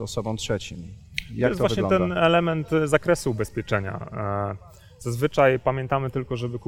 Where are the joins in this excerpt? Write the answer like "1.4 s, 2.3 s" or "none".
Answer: none

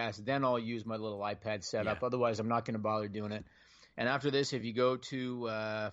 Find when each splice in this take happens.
none

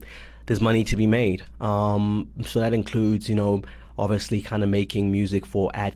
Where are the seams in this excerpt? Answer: none

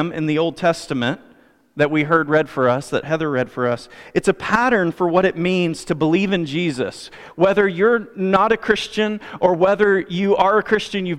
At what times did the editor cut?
none

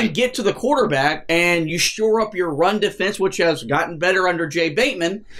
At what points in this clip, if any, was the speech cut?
none

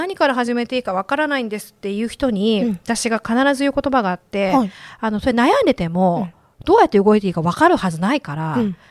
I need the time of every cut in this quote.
none

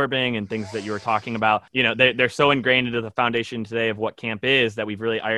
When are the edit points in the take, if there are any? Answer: 1.7 s

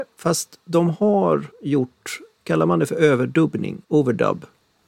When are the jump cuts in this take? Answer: 1.5 s, 3.8 s

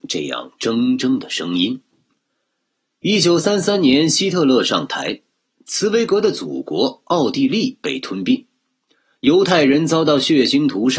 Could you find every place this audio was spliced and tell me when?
none

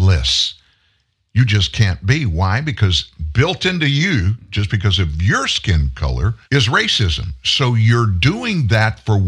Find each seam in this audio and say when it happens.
6.4 s

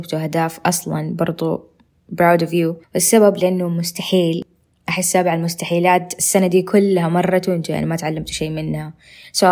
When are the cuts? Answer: none

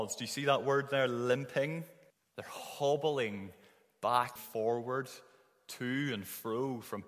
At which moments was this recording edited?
2.1 s, 4.4 s

